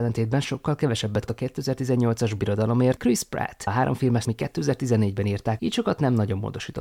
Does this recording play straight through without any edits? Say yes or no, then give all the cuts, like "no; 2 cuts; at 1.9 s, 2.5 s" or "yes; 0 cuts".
no; 6 cuts; at 1.3 s, 2.4 s, 3.0 s, 3.7 s, 4.2 s, 5.6 s